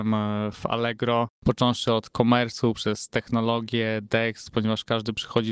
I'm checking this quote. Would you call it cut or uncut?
uncut